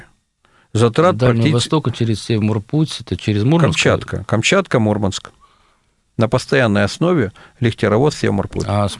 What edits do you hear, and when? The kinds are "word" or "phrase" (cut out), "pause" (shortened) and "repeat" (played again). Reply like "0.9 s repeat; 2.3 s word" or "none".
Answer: none